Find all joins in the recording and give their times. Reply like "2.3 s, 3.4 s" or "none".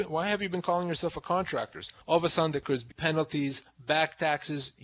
2.0 s, 2.9 s